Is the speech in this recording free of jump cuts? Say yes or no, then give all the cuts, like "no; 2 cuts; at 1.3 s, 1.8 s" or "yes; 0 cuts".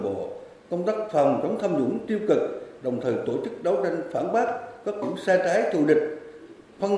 no; 1 cut; at 5.0 s